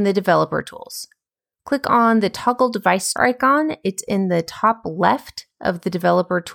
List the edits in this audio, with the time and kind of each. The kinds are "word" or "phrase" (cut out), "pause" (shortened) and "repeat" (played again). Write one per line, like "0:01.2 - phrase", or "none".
0:03.2 - word